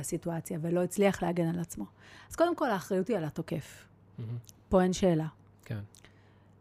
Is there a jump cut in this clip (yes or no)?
no